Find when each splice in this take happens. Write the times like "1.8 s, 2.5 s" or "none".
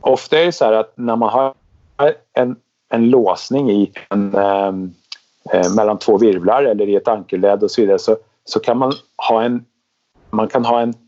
none

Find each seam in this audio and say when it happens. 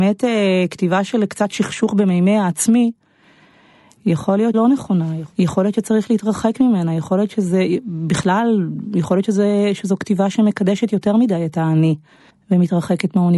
4.5 s

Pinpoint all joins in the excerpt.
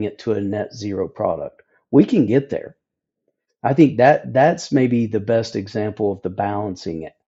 none

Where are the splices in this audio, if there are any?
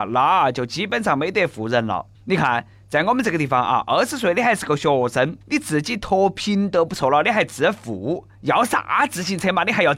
2.1 s, 5.4 s, 8.3 s

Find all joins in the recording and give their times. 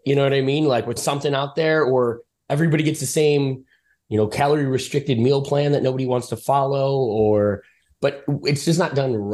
1.0 s

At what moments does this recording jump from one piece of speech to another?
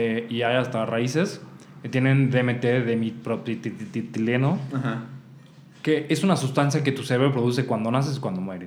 none

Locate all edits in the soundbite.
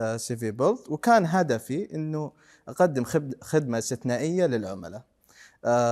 none

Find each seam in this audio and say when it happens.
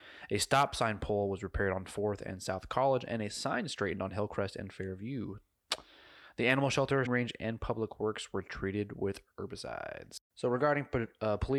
7.1 s, 10.2 s

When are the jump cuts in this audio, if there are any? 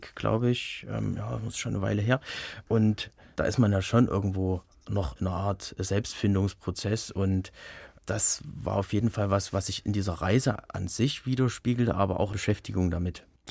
12.3 s

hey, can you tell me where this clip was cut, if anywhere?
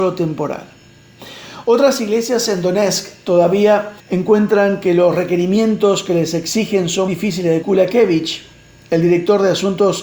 4.0 s, 7.1 s, 7.6 s

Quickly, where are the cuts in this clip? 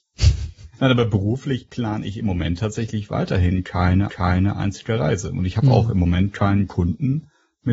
4.1 s

